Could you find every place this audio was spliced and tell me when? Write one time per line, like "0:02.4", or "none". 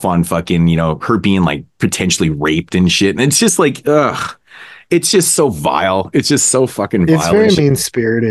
none